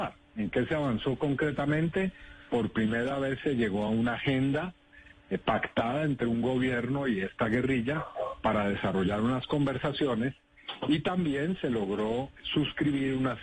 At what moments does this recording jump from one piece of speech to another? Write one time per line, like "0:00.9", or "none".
none